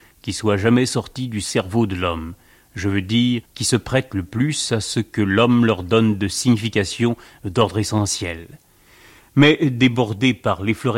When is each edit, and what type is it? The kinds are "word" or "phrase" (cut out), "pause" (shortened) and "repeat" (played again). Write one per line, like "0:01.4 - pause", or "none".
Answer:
0:03.5 - pause